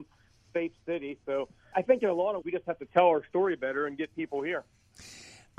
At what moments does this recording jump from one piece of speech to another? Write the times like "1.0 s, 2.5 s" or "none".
1.7 s, 2.4 s

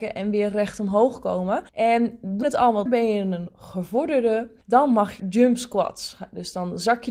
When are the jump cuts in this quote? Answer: 1.7 s, 2.4 s, 2.9 s, 4.6 s, 5.2 s

